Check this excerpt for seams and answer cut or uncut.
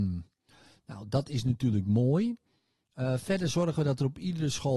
uncut